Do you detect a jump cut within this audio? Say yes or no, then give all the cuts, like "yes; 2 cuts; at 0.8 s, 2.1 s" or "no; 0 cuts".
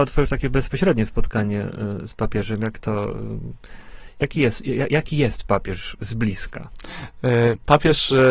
no; 0 cuts